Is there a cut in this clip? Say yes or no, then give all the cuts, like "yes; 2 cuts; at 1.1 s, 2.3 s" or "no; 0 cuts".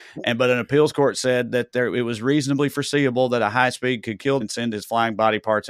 yes; 1 cut; at 4.4 s